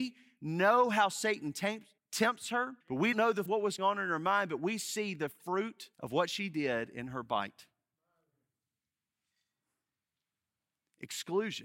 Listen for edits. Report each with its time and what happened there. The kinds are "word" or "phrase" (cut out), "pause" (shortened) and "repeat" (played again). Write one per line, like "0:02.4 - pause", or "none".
0:02.0 - pause
0:02.8 - pause
0:03.1 - word
0:03.5 - phrase
0:03.8 - word
0:05.9 - pause